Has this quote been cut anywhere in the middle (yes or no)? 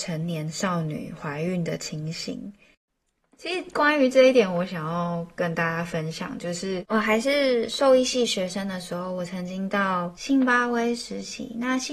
no